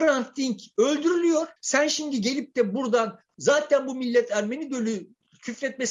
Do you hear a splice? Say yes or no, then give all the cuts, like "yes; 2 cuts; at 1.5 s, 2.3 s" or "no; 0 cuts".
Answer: yes; 1 cut; at 1.6 s